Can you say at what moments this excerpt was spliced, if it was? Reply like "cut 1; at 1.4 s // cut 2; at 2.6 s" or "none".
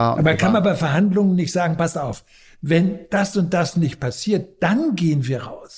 none

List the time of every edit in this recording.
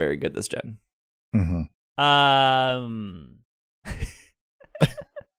none

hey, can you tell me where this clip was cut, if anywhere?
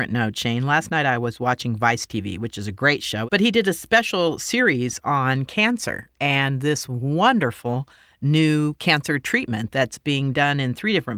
none

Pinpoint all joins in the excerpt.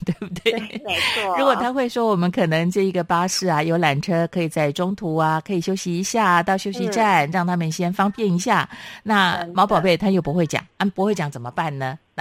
none

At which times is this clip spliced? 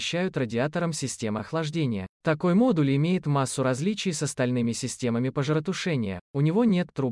cut 1; at 2.1 s

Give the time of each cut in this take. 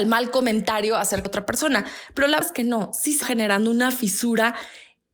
cut 1; at 1.3 s // cut 2; at 2.4 s // cut 3; at 3.2 s

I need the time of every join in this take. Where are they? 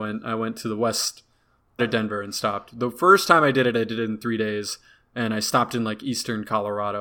cut 1; at 1.8 s

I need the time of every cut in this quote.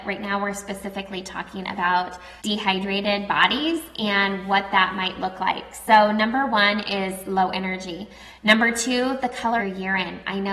cut 1; at 2.4 s // cut 2; at 9.6 s

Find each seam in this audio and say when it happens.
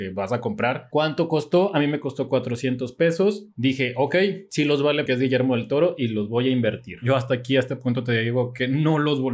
cut 1; at 5.1 s

